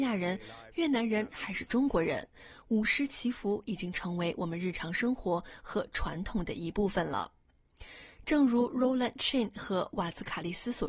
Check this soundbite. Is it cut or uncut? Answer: uncut